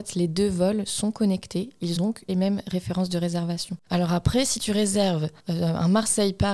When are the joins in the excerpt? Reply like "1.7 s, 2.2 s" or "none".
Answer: 2.0 s, 2.3 s, 5.4 s

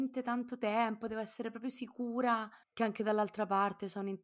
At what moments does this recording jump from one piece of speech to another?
2.6 s

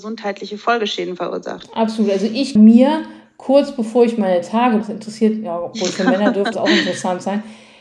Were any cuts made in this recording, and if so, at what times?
2.6 s, 4.8 s, 6.5 s

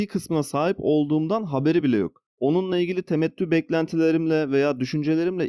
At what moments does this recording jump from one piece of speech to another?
none

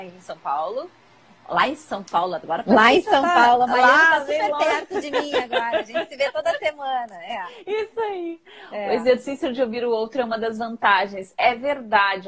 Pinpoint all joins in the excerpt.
none

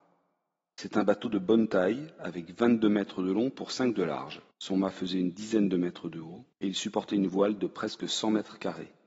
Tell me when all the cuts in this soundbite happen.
4.5 s, 6.5 s

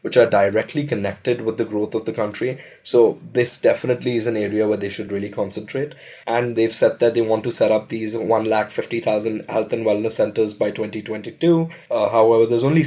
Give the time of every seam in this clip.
none

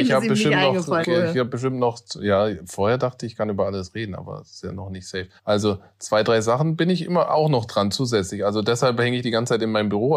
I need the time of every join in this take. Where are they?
1.0 s, 5.4 s

